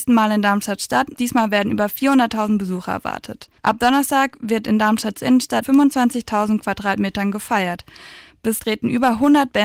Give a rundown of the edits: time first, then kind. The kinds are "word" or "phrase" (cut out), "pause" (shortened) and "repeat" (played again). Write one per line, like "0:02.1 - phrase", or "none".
0:01.1 - phrase
0:03.6 - pause
0:05.6 - word
0:08.6 - word